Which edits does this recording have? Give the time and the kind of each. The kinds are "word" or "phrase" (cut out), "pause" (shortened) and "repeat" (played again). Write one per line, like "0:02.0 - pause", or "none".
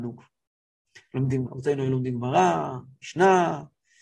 0:01.5 - word